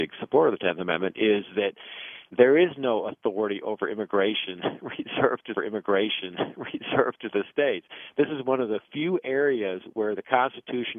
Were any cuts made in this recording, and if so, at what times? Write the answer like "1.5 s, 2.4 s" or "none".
5.6 s